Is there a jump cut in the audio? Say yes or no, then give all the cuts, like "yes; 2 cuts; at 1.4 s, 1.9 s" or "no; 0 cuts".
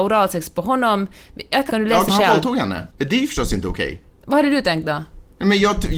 yes; 3 cuts; at 1.7 s, 2.1 s, 2.9 s